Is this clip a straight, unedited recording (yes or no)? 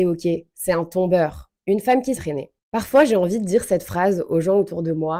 no